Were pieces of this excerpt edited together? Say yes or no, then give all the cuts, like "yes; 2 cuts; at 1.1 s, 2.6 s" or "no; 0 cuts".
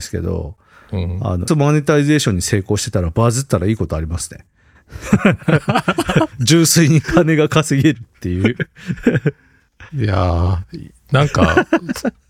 yes; 1 cut; at 1.5 s